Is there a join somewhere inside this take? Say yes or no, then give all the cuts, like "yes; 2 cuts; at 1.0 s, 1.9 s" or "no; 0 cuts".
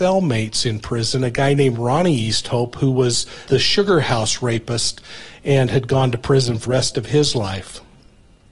yes; 2 cuts; at 3.5 s, 6.7 s